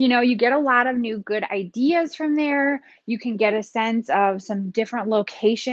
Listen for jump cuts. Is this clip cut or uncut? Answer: uncut